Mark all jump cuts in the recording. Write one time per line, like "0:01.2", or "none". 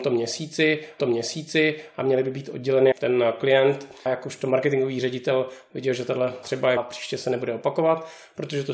0:01.0
0:02.9
0:04.1
0:06.4
0:06.8